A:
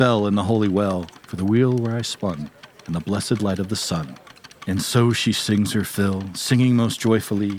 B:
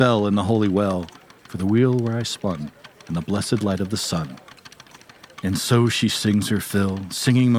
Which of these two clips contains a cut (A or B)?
A